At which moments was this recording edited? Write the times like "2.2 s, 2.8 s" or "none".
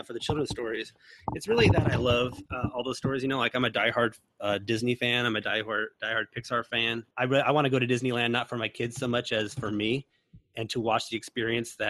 7.1 s